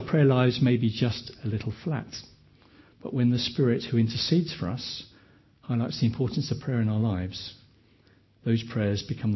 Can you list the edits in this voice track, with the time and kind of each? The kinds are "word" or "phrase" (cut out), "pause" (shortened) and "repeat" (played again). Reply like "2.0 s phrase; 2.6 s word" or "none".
none